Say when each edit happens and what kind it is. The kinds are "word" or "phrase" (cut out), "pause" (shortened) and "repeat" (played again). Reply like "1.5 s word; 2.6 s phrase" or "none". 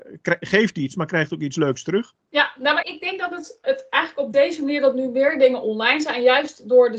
2.2 s pause; 2.8 s word; 3.6 s word